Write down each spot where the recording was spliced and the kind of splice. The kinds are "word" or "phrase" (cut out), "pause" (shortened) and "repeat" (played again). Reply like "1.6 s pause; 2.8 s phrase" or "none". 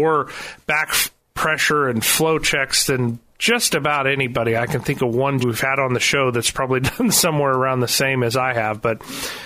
5.4 s phrase